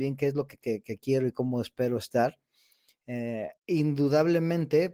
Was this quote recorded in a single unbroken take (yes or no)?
no